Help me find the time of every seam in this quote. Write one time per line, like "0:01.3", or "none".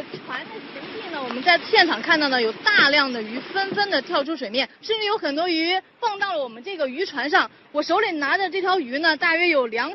0:04.7